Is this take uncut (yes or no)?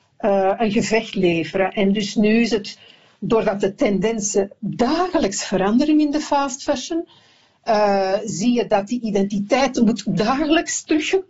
yes